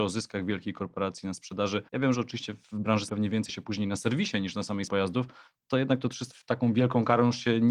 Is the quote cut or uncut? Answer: cut